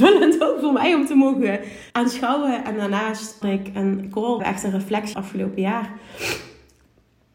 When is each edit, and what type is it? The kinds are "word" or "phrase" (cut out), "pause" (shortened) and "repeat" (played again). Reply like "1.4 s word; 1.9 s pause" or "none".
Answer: 1.9 s pause; 3.4 s word; 4.4 s word; 5.1 s phrase